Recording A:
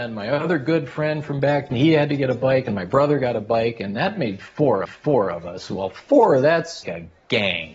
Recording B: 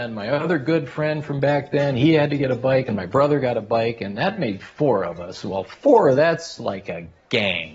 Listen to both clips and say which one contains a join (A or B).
A